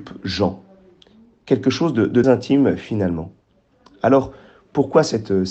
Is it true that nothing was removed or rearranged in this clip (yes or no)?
no